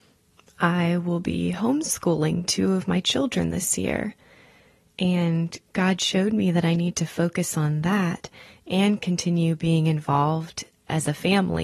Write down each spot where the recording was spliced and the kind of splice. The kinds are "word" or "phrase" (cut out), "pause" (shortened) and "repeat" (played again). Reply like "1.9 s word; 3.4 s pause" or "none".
none